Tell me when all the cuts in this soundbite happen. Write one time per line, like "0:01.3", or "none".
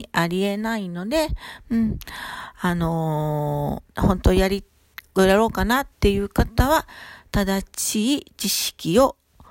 0:03.9
0:05.9